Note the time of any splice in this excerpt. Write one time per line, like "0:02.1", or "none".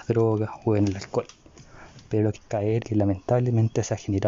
0:02.4
0:02.8